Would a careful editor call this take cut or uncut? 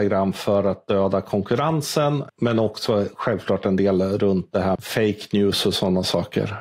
cut